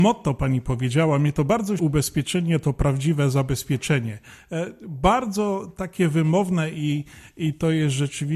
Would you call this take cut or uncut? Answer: cut